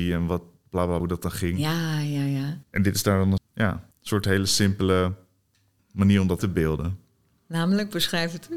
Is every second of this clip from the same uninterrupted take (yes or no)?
no